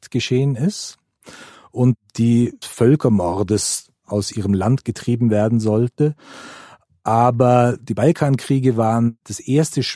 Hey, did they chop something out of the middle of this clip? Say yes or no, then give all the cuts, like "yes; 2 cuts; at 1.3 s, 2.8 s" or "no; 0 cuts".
yes; 1 cut; at 2.6 s